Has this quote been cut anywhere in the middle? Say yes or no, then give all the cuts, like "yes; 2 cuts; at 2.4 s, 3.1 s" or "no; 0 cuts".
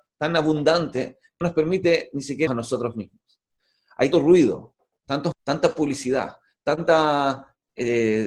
yes; 4 cuts; at 1.4 s, 2.5 s, 4.1 s, 5.3 s